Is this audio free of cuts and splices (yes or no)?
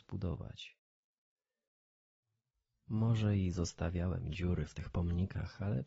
yes